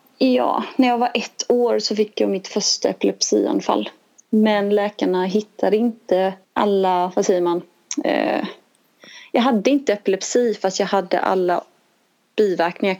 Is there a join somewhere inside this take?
yes; 2 cuts; at 4.2 s, 6.4 s

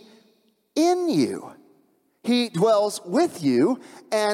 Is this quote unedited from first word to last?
yes; 0 cuts

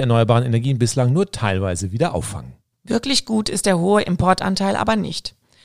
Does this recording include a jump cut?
no; 0 cuts

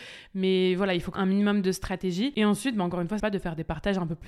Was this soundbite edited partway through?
yes; 2 cuts; at 1.1 s, 3.2 s

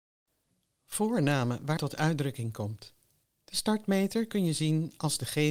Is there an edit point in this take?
yes; 2 cuts; at 1.8 s, 3.2 s

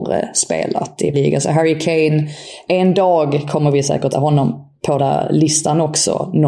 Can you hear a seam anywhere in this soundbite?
yes; 3 cuts; at 1.1 s, 4.1 s, 5.0 s

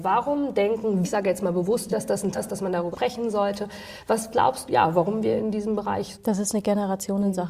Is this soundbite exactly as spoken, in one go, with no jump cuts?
no; 8 cuts; at 1.0 s, 1.9 s, 2.3 s, 2.9 s, 4.3 s, 4.7 s, 5.4 s, 6.1 s

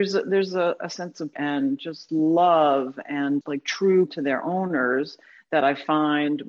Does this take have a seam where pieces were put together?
yes; 4 cuts; at 1.3 s, 2.1 s, 3.4 s, 4.1 s

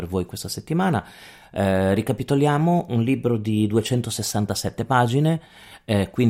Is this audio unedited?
yes; 0 cuts

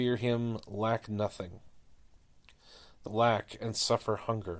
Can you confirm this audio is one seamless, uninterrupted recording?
no; 1 cut; at 3.1 s

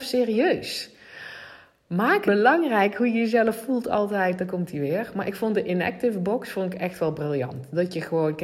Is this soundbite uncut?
no; 1 cut; at 2.3 s

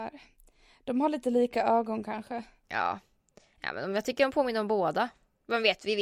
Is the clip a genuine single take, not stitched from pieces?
yes; 0 cuts

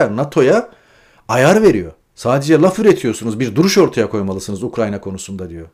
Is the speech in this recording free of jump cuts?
no; 1 cut; at 2.0 s

